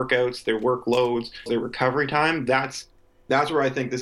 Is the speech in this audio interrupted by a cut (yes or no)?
yes